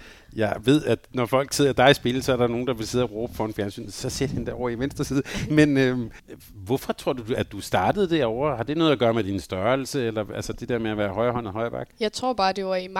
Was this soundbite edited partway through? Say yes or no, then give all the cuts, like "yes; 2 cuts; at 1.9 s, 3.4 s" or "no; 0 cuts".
no; 0 cuts